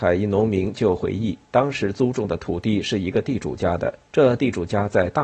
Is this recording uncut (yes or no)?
no